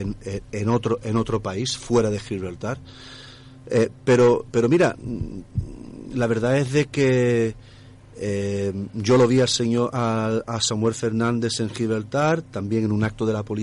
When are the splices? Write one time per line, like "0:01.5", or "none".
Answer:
none